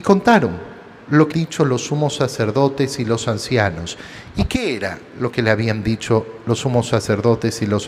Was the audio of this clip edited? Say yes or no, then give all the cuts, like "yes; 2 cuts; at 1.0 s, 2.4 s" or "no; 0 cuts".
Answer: yes; 1 cut; at 1.3 s